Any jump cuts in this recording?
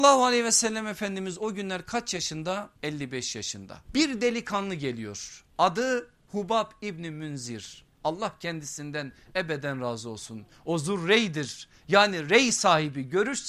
yes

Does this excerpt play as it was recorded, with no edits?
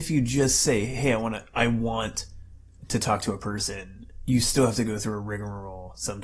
yes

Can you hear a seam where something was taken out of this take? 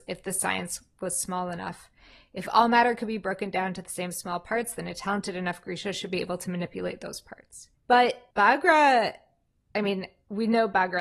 no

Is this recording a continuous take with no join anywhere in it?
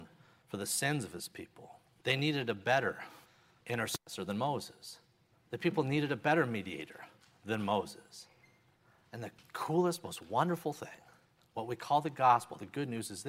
yes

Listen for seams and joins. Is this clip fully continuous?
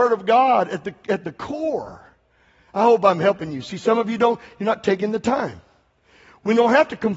yes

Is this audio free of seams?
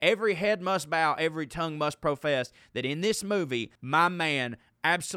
no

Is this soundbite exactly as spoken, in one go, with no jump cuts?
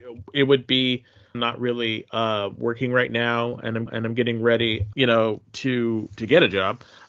no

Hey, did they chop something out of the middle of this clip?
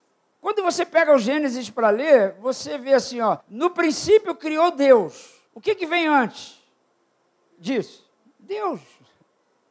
yes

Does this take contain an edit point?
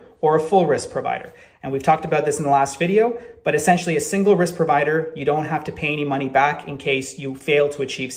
no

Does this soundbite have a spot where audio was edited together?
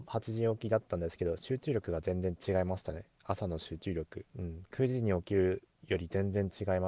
yes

